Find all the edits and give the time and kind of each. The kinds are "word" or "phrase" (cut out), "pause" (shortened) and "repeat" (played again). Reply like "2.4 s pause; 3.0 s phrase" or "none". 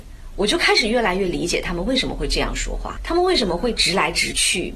3.0 s word